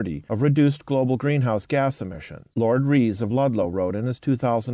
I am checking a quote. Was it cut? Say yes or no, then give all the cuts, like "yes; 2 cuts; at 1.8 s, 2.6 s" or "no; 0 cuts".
no; 0 cuts